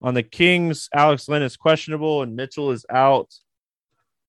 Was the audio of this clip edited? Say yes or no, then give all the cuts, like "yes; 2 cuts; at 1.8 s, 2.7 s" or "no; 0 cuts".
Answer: no; 0 cuts